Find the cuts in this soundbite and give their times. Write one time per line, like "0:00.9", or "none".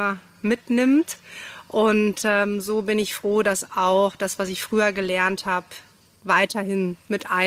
none